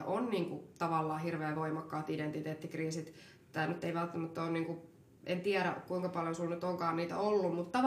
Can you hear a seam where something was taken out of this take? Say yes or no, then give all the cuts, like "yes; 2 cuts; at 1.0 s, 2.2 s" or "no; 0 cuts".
no; 0 cuts